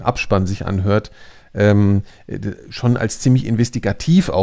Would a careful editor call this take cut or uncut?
uncut